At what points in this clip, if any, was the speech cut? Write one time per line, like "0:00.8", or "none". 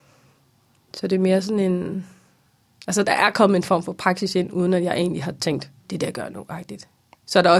0:05.8